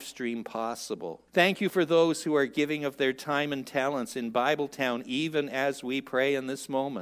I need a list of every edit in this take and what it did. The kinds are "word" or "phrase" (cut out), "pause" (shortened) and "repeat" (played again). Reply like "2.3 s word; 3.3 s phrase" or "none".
1.3 s pause